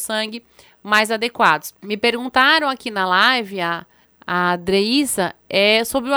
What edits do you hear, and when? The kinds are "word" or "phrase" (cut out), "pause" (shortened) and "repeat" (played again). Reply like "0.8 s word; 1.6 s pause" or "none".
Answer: 1.8 s pause; 4.0 s pause